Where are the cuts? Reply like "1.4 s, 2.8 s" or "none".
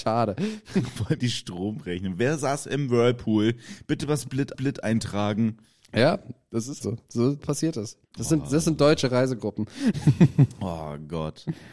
1.2 s, 4.5 s, 6.8 s, 7.4 s, 8.1 s